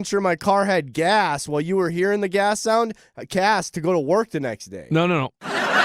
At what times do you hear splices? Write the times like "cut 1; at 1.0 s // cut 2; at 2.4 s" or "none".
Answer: none